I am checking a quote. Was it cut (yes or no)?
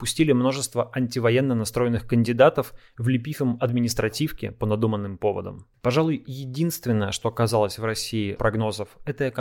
yes